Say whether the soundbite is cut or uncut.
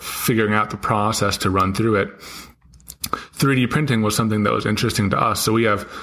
uncut